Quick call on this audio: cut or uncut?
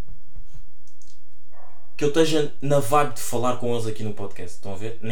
uncut